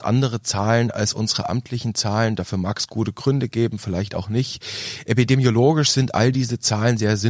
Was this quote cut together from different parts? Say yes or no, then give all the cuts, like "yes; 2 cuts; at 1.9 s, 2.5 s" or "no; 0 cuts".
no; 0 cuts